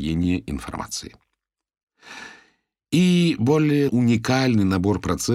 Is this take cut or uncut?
cut